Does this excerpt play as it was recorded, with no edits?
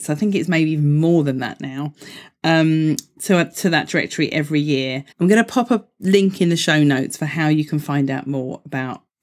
no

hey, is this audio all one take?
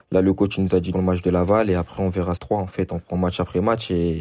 no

